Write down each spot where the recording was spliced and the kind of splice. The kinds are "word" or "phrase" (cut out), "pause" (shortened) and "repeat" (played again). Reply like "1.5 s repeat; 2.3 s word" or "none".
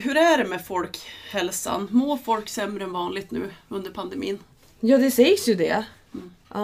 none